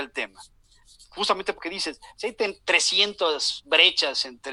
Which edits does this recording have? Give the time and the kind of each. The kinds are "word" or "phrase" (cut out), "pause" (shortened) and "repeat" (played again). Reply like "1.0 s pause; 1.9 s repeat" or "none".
1.6 s word